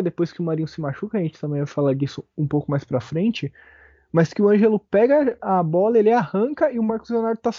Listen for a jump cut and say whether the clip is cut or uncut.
uncut